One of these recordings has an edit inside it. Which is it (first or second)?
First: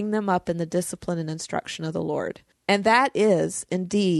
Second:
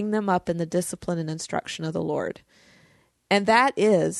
first